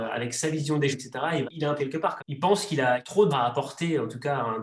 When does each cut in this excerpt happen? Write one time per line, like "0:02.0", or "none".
0:00.9
0:01.4
0:01.8
0:02.2
0:03.3